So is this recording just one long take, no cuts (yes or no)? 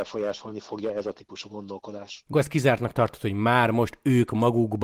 no